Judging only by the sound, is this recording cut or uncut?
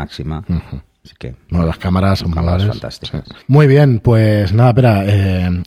cut